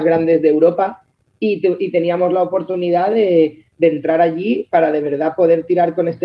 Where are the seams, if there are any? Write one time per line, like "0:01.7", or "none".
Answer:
none